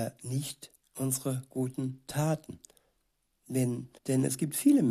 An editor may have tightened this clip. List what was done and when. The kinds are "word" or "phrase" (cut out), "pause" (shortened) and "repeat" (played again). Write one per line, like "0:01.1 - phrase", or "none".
0:04.0 - pause